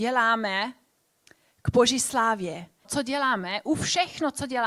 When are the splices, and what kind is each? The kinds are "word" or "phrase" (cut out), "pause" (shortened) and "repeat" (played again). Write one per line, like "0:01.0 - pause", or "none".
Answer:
0:02.8 - phrase